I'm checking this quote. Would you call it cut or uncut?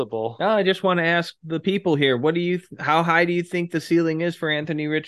uncut